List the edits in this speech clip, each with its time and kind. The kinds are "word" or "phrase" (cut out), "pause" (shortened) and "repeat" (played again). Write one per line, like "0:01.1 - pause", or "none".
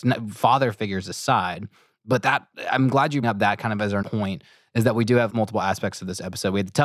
0:03.2 - word
0:04.0 - word
0:05.3 - word